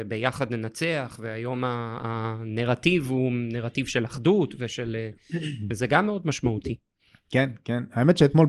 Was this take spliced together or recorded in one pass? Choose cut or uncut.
uncut